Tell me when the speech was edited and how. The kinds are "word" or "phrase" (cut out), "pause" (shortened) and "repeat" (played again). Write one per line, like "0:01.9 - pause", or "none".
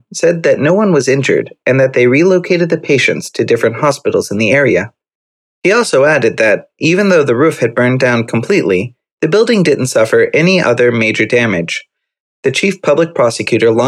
none